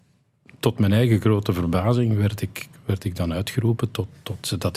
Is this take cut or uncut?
uncut